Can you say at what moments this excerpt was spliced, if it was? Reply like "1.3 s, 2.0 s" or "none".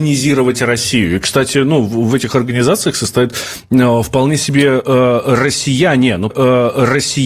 6.3 s